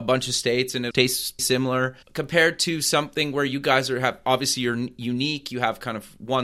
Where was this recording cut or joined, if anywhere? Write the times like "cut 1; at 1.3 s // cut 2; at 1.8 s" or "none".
cut 1; at 0.9 s // cut 2; at 1.4 s // cut 3; at 2.0 s